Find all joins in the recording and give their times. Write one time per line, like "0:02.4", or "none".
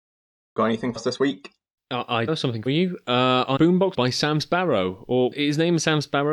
0:01.0
0:02.3
0:02.7
0:03.6
0:03.9
0:05.3